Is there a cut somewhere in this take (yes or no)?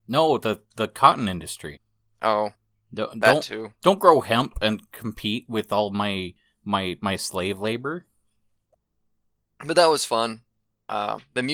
no